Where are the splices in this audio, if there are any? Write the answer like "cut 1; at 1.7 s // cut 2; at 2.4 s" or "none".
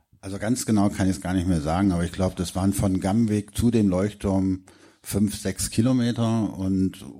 none